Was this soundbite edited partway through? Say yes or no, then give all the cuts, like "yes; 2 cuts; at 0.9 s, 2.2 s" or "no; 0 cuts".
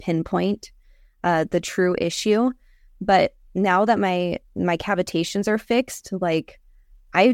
no; 0 cuts